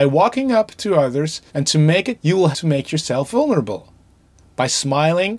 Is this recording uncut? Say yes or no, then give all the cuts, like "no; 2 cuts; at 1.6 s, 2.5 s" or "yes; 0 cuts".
no; 3 cuts; at 1.5 s, 2.2 s, 2.5 s